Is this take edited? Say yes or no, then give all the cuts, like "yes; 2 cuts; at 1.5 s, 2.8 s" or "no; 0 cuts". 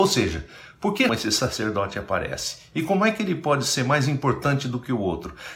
yes; 1 cut; at 1.1 s